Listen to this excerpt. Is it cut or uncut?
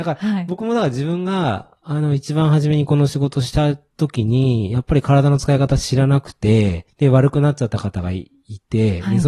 cut